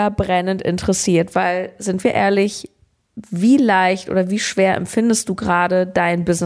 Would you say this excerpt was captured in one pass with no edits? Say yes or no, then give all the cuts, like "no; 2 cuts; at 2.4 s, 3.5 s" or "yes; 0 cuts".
yes; 0 cuts